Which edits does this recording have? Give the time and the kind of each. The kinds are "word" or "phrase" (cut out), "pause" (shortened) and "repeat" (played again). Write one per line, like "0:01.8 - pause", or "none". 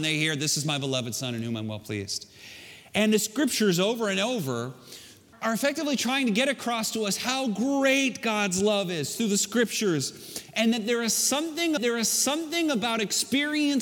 0:05.3 - word
0:09.2 - phrase
0:11.8 - repeat